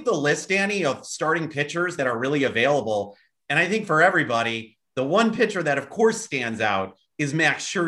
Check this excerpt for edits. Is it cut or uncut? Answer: uncut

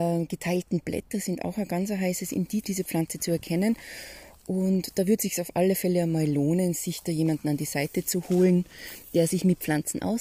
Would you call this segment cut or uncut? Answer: cut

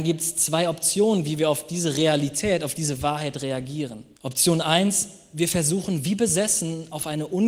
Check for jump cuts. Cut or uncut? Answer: cut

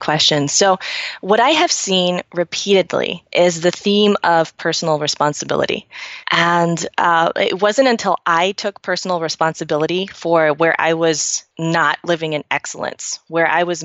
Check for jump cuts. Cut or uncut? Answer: cut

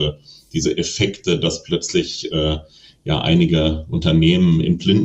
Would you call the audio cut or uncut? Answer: uncut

